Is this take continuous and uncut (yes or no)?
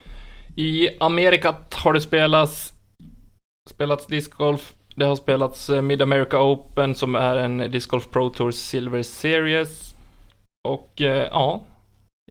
yes